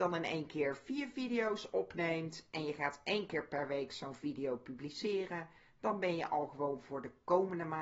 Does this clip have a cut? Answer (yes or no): no